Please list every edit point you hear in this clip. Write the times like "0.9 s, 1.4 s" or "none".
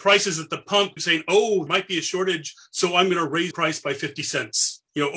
1.0 s, 1.7 s, 3.5 s